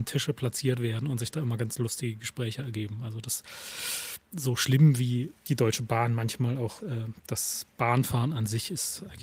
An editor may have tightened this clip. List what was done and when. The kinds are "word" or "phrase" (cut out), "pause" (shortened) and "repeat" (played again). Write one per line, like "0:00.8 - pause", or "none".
0:05.4 - pause
0:06.8 - word